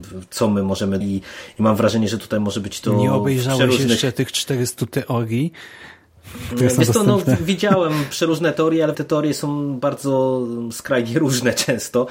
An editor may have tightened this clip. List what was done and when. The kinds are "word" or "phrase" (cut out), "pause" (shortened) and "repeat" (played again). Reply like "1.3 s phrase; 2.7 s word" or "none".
1.0 s phrase; 8.9 s word